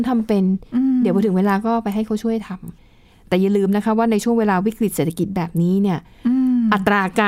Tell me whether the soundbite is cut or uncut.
cut